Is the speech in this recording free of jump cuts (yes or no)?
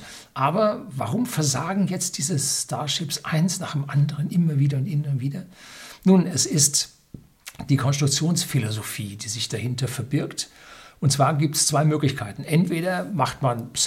yes